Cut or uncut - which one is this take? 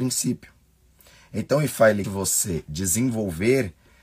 cut